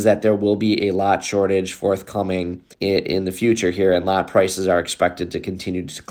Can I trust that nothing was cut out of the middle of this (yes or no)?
no